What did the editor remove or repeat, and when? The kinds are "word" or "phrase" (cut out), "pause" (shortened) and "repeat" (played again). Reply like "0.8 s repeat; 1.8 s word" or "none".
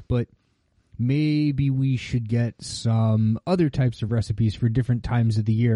none